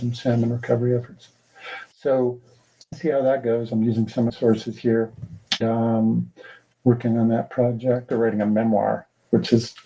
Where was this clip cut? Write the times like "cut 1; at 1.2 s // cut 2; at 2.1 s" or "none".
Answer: cut 1; at 2.9 s // cut 2; at 4.3 s // cut 3; at 5.6 s // cut 4; at 8.1 s